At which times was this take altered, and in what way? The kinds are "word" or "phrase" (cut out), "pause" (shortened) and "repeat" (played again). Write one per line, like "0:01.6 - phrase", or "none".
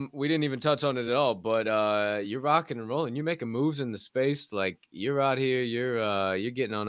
none